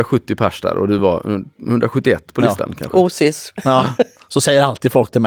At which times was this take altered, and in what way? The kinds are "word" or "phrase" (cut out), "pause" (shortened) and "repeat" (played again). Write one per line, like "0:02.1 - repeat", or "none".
none